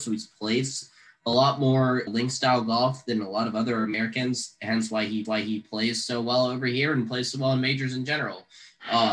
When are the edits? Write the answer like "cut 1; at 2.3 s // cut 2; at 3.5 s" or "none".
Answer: cut 1; at 2.1 s // cut 2; at 5.2 s